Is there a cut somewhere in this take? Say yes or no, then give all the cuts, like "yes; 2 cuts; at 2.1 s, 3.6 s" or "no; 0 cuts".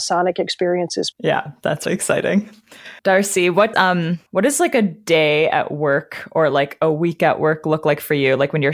yes; 5 cuts; at 1.1 s, 1.9 s, 3.0 s, 3.7 s, 4.3 s